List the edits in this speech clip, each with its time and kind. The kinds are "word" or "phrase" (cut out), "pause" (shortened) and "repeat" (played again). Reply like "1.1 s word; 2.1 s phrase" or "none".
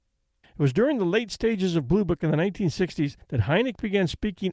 3.2 s pause